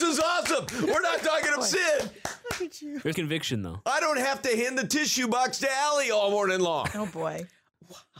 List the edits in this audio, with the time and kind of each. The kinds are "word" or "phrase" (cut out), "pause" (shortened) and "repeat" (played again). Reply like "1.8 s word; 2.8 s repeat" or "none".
1.6 s word; 3.1 s word

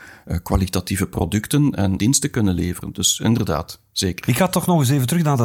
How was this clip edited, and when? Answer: 2.0 s word

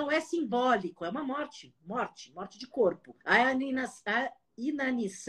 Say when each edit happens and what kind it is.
3.2 s pause

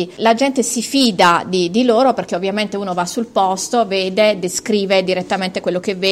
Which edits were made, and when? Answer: none

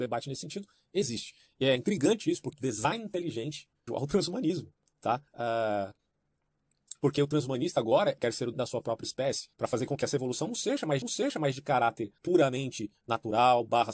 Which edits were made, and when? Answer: 2.5 s word; 3.9 s phrase; 5.3 s pause; 8.2 s phrase; 8.5 s word; 9.5 s pause; 11.0 s repeat; 12.2 s pause

